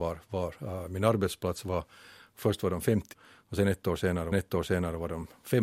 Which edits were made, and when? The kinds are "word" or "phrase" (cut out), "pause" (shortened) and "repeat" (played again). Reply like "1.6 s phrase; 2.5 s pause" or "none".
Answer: 3.1 s word; 4.3 s repeat